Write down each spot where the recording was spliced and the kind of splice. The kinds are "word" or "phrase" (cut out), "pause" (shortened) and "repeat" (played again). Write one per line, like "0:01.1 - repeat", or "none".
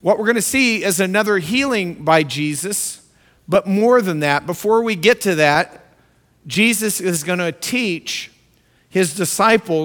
none